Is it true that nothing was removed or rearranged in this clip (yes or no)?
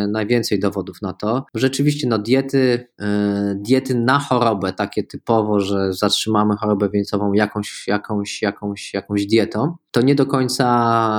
yes